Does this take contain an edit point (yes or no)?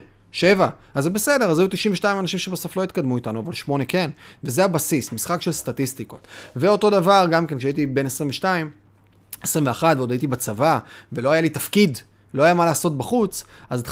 no